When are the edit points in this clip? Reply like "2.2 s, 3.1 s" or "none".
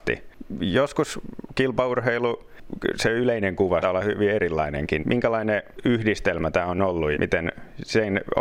3.8 s, 5.0 s, 7.1 s